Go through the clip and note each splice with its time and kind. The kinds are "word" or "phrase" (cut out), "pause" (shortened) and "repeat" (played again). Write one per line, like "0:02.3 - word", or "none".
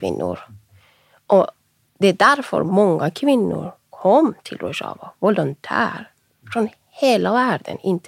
none